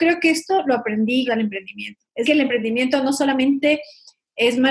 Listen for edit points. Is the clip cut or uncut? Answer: cut